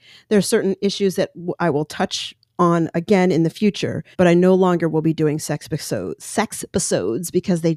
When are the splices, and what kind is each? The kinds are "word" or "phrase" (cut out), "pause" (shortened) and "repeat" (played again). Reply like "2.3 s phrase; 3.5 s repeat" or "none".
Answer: 4.1 s pause